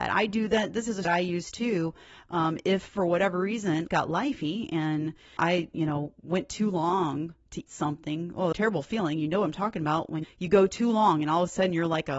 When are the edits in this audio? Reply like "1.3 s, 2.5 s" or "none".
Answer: 1.0 s, 3.9 s, 5.4 s, 7.7 s, 8.5 s, 10.2 s